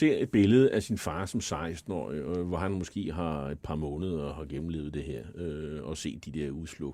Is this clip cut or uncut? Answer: uncut